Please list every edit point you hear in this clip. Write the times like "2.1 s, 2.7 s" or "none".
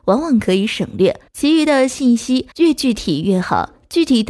1.3 s, 2.5 s